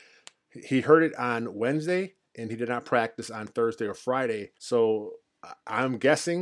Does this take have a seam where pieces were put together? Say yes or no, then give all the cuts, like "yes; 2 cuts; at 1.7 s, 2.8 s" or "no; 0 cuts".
yes; 1 cut; at 4.6 s